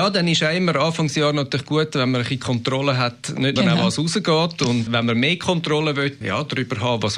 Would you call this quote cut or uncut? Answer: cut